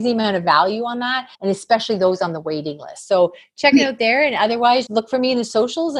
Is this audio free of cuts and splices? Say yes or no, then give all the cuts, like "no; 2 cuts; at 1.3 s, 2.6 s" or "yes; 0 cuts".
no; 2 cuts; at 1.3 s, 4.9 s